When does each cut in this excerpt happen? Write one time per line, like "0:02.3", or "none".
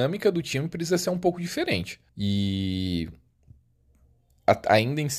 0:02.1